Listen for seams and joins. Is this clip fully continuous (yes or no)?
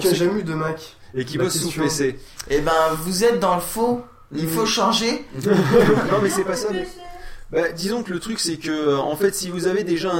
yes